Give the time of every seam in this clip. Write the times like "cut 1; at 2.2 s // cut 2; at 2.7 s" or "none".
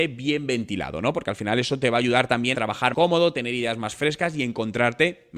cut 1; at 2.5 s // cut 2; at 2.9 s

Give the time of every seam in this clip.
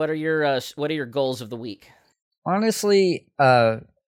none

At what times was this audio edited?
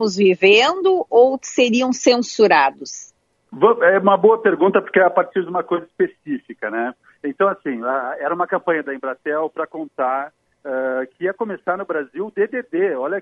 none

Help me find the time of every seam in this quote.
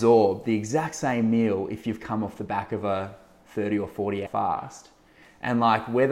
cut 1; at 4.3 s

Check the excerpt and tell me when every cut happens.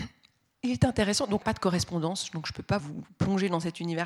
cut 1; at 1.4 s // cut 2; at 2.8 s

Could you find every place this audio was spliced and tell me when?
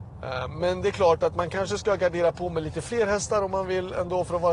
none

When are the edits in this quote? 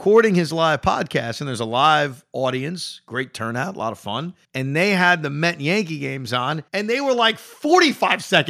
cut 1; at 4.4 s // cut 2; at 6.7 s

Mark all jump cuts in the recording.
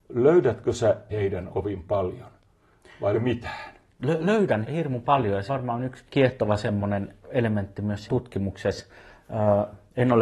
cut 1; at 1.1 s // cut 2; at 1.5 s // cut 3; at 3.1 s // cut 4; at 4.6 s // cut 5; at 5.5 s // cut 6; at 6.1 s // cut 7; at 7.2 s // cut 8; at 8.1 s

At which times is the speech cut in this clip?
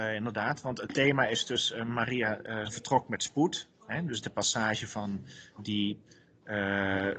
cut 1; at 2.6 s // cut 2; at 4.2 s // cut 3; at 5.6 s

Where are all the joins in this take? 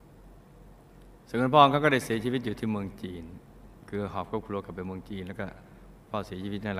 none

